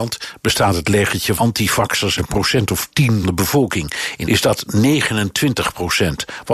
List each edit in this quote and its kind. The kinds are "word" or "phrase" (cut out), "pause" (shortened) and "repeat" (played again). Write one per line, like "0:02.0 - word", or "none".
0:01.4 - word
0:02.2 - word
0:03.2 - word
0:04.2 - word